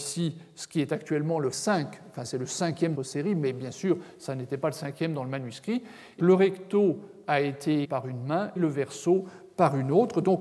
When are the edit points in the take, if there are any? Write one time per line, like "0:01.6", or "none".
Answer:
0:01.5
0:02.9
0:06.2
0:07.8
0:08.6